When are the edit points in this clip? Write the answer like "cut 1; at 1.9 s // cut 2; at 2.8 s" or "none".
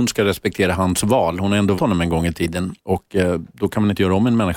cut 1; at 1.8 s // cut 2; at 2.8 s